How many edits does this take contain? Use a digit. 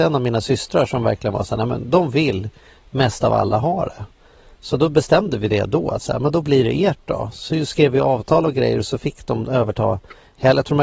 0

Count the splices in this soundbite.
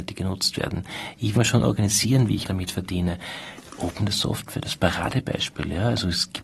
3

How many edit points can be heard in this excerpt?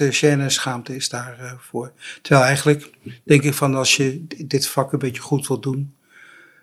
0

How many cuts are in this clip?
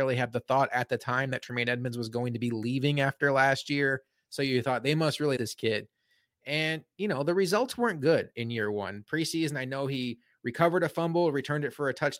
1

